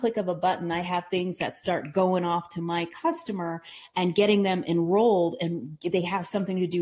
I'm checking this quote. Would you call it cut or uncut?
uncut